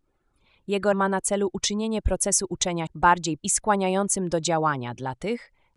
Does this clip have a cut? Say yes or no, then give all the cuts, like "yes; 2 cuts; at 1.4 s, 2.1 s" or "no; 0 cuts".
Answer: yes; 3 cuts; at 0.9 s, 2.9 s, 3.4 s